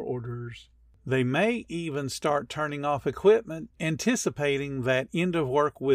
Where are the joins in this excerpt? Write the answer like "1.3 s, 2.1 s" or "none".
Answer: 3.7 s